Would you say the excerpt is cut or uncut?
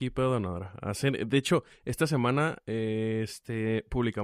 uncut